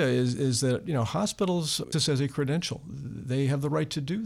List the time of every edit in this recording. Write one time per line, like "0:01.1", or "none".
0:01.9

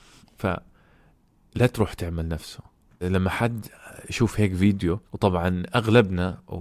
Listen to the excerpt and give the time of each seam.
0:03.0
0:05.1

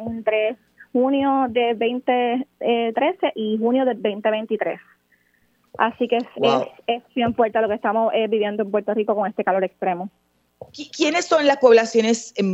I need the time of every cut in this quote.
none

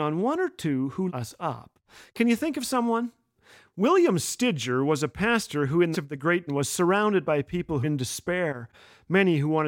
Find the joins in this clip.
0:01.1
0:05.9
0:06.5
0:07.8

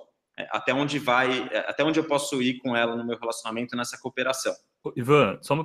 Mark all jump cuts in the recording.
none

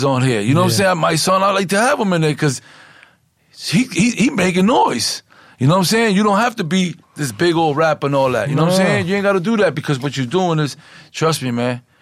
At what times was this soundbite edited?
0:07.0

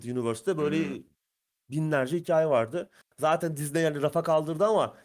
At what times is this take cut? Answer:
none

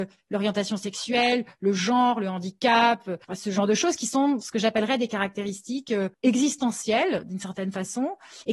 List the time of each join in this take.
0:03.2
0:06.1

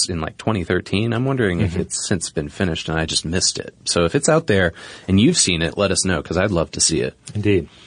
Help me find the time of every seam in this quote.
none

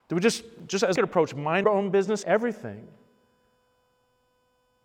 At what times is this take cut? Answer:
0:01.0
0:01.6
0:02.2

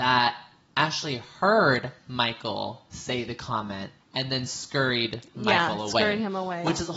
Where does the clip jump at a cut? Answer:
0:04.0

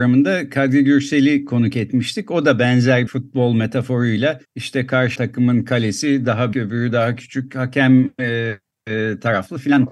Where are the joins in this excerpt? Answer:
0:03.1
0:04.4
0:05.2
0:06.5

